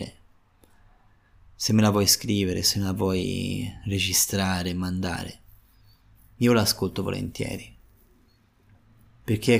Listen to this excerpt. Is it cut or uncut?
uncut